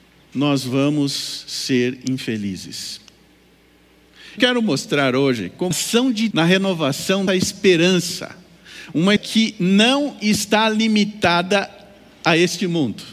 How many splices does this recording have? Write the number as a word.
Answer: five